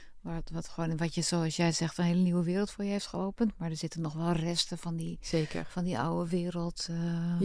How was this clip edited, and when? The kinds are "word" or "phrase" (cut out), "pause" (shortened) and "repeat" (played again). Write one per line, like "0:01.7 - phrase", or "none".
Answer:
none